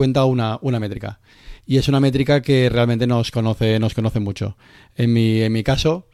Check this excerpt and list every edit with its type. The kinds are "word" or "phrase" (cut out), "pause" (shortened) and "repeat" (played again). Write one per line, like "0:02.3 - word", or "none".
none